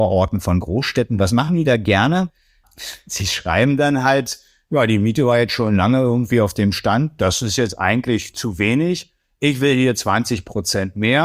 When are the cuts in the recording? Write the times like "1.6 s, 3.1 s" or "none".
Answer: none